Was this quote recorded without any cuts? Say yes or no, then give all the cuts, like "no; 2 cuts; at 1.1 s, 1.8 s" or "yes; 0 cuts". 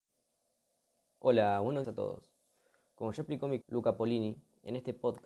no; 2 cuts; at 1.8 s, 3.6 s